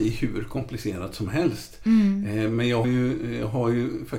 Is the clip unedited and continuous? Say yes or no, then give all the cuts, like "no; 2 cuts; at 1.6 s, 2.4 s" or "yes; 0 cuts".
no; 1 cut; at 2.8 s